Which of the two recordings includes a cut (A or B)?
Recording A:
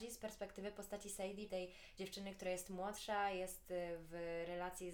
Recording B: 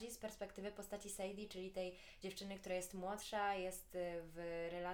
A